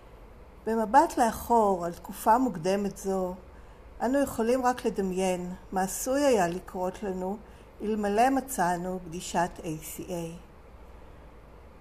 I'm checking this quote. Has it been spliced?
no; 0 cuts

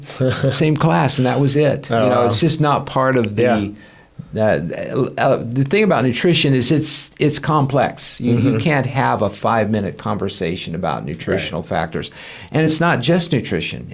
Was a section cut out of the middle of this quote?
no; 0 cuts

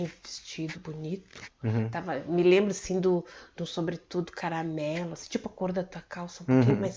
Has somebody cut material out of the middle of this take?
no; 0 cuts

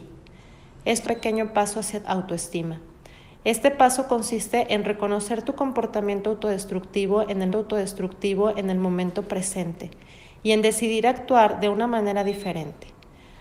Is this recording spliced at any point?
yes; 3 cuts; at 1.1 s, 2.0 s, 7.5 s

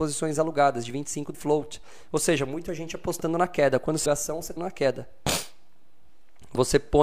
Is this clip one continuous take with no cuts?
no; 3 cuts; at 1.3 s, 4.1 s, 4.6 s

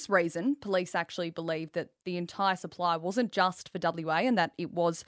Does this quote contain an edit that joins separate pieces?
no; 0 cuts

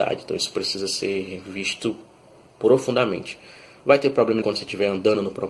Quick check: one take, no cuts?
no; 1 cut; at 4.4 s

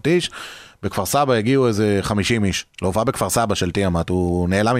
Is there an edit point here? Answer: no; 0 cuts

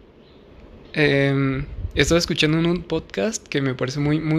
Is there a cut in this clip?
no; 0 cuts

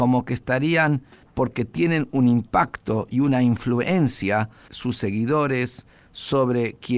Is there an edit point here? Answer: yes; 2 cuts; at 1.2 s, 4.7 s

